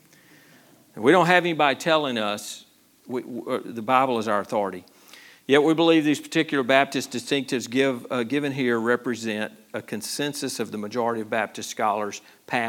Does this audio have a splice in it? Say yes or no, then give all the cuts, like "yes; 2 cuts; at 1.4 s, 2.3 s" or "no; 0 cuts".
no; 0 cuts